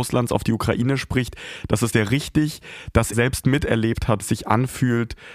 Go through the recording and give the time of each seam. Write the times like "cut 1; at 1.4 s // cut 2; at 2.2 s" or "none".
cut 1; at 1.9 s // cut 2; at 3.1 s // cut 3; at 4.2 s